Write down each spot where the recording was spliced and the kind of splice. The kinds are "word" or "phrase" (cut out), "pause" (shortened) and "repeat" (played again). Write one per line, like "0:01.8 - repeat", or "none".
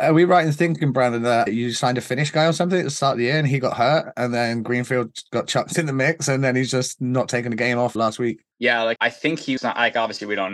0:01.5 - word
0:08.0 - word
0:08.5 - pause
0:09.0 - word
0:09.6 - word